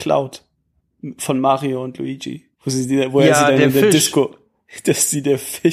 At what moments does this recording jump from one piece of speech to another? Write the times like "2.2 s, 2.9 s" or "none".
2.5 s